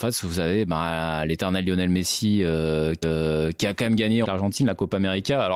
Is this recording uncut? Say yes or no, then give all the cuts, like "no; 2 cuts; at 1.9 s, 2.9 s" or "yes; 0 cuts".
no; 2 cuts; at 3.0 s, 4.2 s